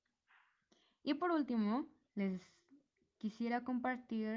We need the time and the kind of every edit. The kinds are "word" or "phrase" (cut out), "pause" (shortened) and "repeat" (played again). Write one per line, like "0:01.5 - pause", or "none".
none